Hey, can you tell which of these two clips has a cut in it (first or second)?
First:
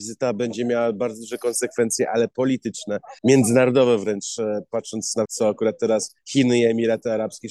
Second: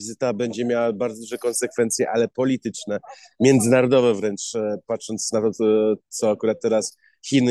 first